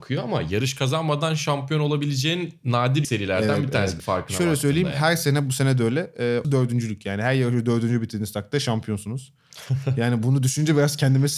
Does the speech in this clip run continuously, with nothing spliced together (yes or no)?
no